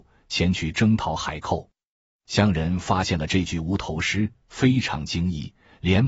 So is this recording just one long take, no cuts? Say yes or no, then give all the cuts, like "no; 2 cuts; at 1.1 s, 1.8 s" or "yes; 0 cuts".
yes; 0 cuts